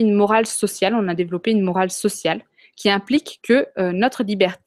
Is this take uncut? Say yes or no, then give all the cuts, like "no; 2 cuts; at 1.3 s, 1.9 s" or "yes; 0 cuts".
yes; 0 cuts